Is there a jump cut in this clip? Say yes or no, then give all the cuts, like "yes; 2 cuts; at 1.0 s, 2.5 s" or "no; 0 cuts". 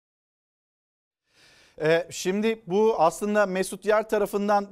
no; 0 cuts